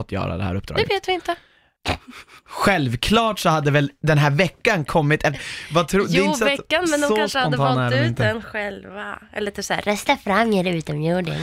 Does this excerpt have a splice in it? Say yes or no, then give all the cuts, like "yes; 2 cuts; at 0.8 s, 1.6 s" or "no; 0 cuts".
no; 0 cuts